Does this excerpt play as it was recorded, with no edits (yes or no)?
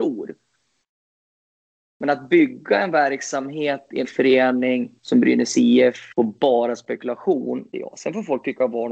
no